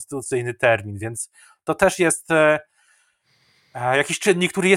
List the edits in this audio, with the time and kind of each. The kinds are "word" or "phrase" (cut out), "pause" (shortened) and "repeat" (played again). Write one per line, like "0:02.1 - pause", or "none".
none